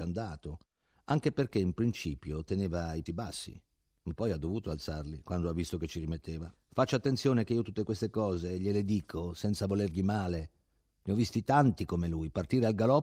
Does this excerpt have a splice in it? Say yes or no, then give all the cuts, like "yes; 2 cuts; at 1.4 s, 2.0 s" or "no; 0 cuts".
yes; 2 cuts; at 3.1 s, 6.6 s